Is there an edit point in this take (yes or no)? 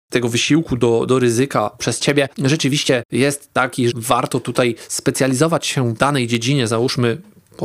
yes